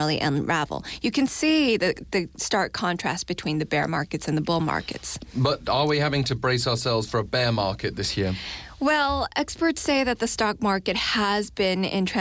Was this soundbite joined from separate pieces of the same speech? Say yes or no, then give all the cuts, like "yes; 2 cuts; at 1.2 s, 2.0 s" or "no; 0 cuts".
no; 0 cuts